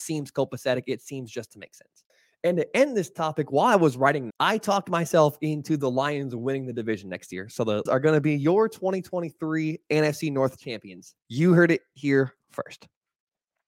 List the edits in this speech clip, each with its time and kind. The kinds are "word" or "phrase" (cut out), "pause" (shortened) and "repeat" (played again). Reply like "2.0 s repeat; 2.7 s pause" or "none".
2.1 s pause; 4.3 s word; 7.9 s word; 11.2 s pause